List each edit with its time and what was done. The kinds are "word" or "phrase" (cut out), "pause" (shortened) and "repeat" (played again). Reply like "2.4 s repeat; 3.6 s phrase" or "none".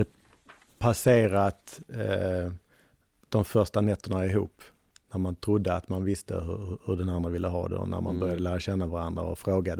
none